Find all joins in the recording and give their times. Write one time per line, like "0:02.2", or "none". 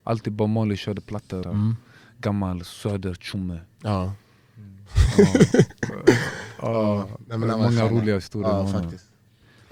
0:01.4